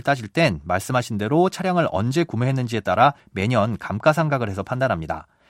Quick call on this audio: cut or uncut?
uncut